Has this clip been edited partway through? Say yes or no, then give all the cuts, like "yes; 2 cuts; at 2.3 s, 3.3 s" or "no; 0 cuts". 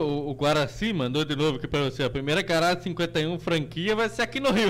no; 0 cuts